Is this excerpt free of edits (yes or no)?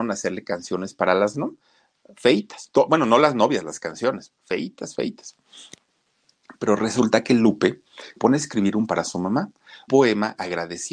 no